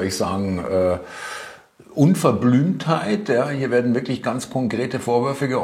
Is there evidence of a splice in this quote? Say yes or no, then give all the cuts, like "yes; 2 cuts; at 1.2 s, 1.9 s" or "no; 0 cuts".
no; 0 cuts